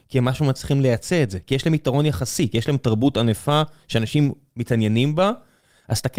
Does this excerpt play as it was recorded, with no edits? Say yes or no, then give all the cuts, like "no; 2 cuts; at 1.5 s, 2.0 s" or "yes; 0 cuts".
yes; 0 cuts